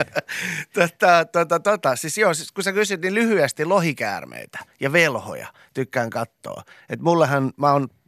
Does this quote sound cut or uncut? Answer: uncut